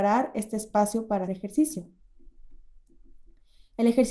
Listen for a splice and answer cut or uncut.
cut